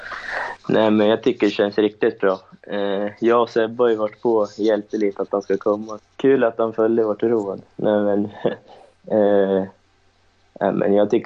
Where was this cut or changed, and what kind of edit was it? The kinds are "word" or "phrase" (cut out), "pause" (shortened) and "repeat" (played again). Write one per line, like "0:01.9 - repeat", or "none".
0:06.0 - word